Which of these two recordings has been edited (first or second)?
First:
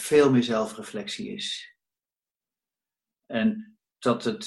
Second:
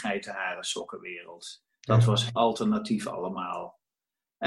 second